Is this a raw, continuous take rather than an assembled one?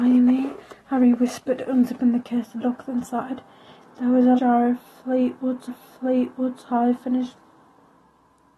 no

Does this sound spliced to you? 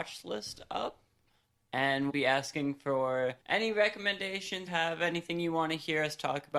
yes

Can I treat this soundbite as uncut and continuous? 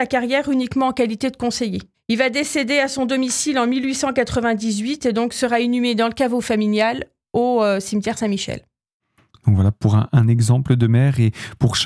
yes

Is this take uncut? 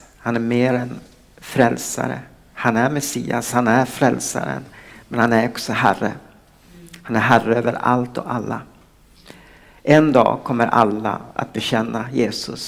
yes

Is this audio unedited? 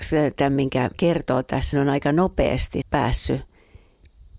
no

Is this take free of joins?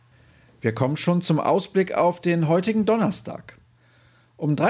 yes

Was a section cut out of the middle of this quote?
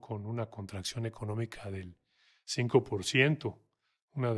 no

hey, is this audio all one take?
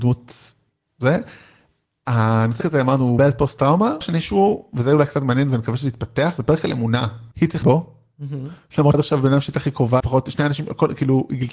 no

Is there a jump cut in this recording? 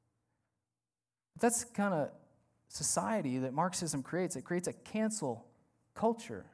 no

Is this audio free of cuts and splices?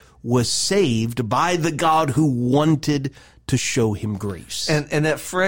yes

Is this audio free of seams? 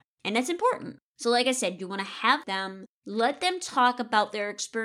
no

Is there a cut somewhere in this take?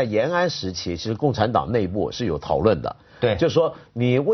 no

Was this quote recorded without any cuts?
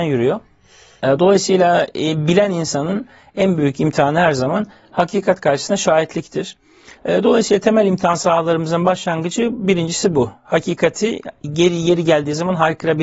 yes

